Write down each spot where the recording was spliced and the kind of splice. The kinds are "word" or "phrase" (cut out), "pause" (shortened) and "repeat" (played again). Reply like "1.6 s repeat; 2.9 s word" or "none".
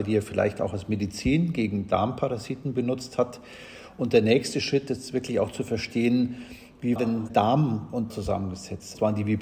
4.9 s word; 7.0 s word; 7.3 s word; 8.1 s word

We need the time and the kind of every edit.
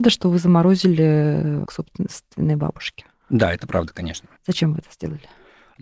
1.7 s word; 4.4 s pause

